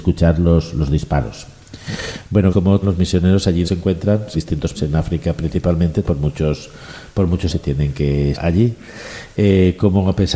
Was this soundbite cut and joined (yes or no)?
yes